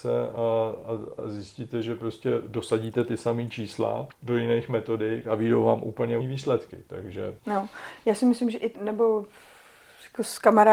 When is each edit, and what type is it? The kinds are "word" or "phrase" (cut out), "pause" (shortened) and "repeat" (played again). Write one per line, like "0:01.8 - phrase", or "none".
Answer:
0:01.2 - word
0:04.1 - pause
0:06.2 - word
0:07.4 - pause
0:08.7 - phrase